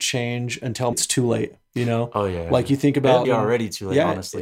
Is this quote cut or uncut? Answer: cut